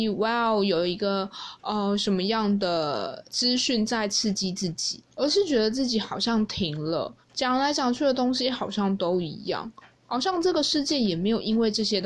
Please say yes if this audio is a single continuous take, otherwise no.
no